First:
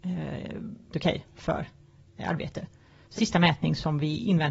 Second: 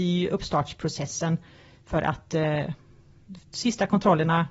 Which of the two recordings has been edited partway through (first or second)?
first